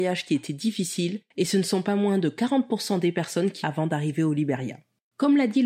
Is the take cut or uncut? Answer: cut